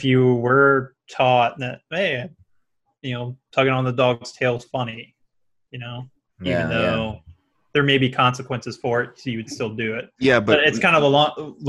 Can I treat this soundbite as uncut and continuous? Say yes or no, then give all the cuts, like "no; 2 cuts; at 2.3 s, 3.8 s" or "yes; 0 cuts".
yes; 0 cuts